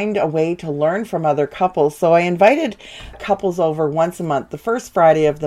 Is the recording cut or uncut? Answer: uncut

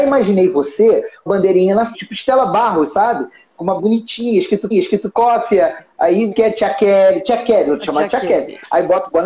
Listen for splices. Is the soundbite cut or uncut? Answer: cut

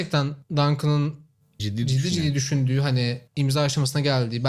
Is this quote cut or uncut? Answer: cut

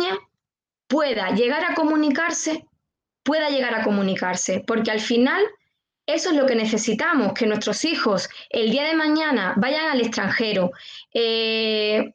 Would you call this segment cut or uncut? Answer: uncut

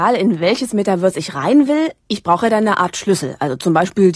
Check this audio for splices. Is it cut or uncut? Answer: uncut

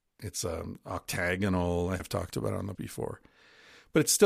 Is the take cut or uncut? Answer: cut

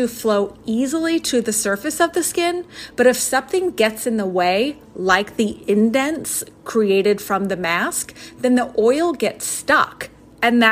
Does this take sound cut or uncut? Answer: uncut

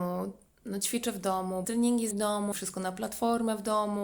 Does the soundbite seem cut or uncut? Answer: cut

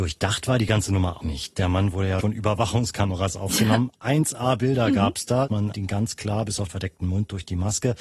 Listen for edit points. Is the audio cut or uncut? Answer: cut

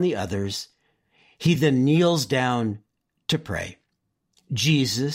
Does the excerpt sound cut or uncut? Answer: uncut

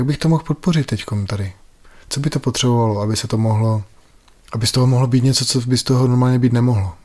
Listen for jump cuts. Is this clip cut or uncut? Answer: uncut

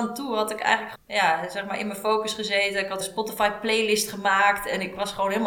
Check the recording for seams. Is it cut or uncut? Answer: cut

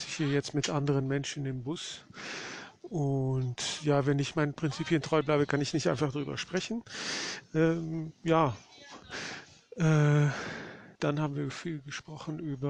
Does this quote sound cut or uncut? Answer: cut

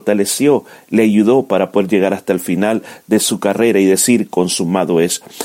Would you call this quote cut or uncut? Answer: uncut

